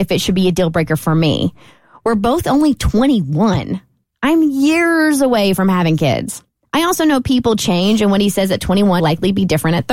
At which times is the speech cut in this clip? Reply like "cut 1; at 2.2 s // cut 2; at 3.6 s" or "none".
cut 1; at 9.0 s